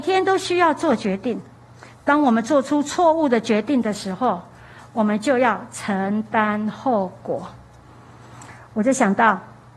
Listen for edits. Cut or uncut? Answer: uncut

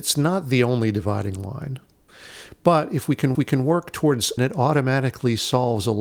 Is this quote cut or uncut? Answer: cut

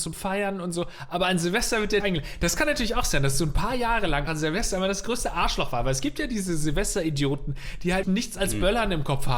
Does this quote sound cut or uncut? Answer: cut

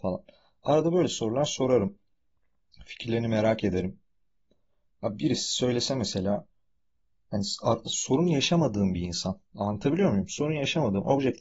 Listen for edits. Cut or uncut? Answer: uncut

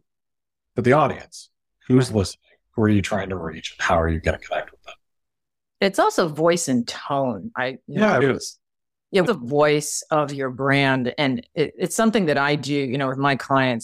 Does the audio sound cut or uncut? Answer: cut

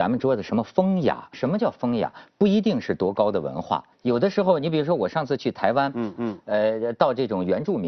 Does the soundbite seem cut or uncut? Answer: cut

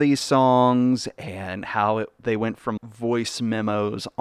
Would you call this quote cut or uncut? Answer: cut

